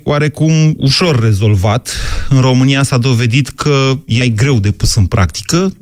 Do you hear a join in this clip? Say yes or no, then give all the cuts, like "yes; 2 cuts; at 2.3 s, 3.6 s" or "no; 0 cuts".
yes; 1 cut; at 4.2 s